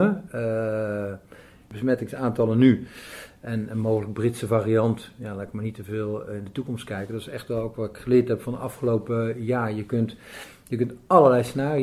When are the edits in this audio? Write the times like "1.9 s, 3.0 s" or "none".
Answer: none